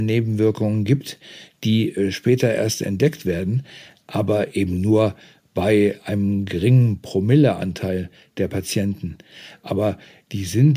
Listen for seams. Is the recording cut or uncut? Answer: uncut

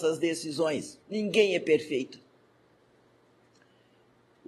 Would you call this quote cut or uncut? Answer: cut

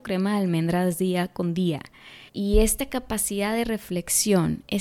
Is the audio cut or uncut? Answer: cut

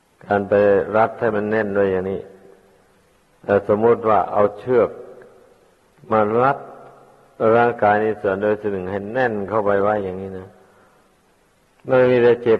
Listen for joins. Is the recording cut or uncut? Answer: uncut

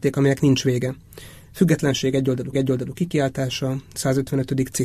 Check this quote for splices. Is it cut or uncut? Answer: cut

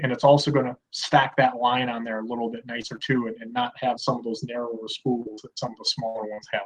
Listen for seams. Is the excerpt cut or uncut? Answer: cut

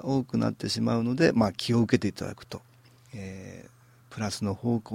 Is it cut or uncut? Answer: uncut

